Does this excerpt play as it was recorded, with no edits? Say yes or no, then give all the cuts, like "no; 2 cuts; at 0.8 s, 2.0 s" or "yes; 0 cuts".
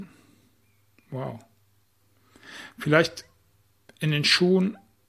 yes; 0 cuts